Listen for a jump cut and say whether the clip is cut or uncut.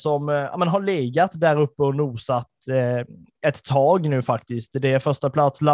uncut